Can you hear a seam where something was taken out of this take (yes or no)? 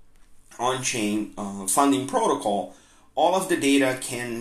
no